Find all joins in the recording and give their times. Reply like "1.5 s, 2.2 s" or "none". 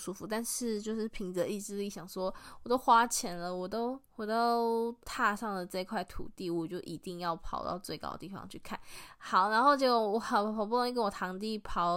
4.1 s, 5.0 s